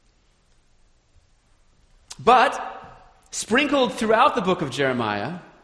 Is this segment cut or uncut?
uncut